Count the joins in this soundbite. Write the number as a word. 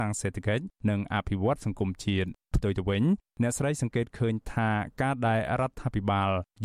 one